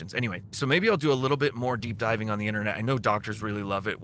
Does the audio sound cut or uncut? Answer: uncut